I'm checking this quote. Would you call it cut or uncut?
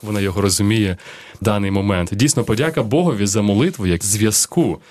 cut